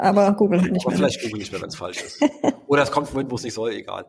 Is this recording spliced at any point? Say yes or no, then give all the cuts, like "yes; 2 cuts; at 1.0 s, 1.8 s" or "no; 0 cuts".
no; 0 cuts